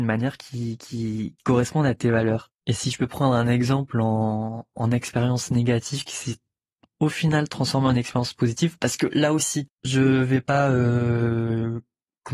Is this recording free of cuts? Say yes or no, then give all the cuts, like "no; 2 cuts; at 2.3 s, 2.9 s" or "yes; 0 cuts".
yes; 0 cuts